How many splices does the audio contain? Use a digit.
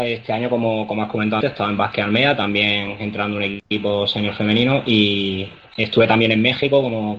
2